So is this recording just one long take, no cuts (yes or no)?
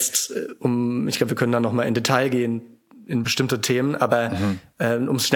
yes